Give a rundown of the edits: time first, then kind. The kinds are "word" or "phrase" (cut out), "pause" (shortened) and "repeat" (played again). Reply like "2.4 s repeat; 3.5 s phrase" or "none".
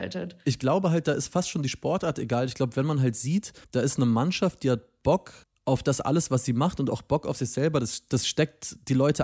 3.6 s pause; 5.4 s pause